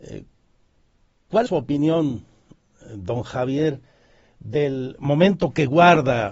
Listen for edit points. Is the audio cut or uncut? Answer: cut